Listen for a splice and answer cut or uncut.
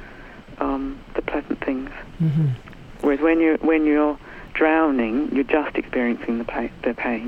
uncut